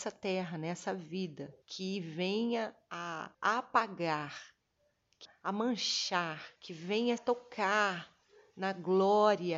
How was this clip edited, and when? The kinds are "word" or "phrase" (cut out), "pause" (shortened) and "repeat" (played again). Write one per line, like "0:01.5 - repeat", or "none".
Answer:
0:01.6 - pause
0:03.3 - pause
0:05.2 - word
0:06.6 - pause
0:07.2 - phrase